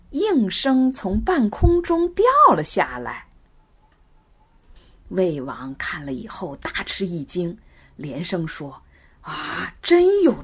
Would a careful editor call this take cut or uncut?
uncut